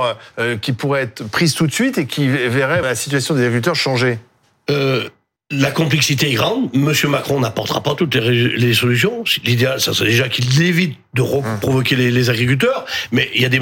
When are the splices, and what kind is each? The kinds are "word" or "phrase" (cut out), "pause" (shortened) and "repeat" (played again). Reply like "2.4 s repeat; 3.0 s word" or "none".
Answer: 2.8 s word; 5.4 s pause